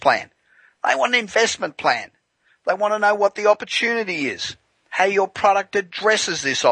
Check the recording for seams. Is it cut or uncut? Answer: uncut